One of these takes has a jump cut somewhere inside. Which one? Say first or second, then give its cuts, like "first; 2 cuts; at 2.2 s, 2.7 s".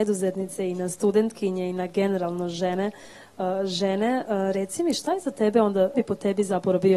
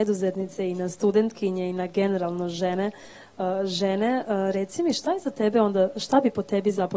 first; 1 cut; at 5.9 s